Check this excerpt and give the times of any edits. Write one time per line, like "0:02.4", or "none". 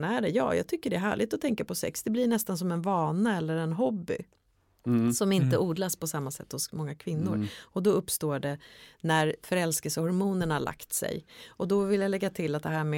none